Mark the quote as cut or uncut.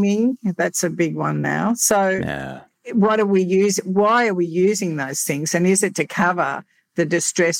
uncut